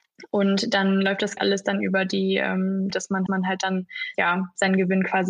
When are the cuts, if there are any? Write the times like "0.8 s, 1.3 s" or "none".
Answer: 1.4 s, 2.9 s, 3.3 s, 4.1 s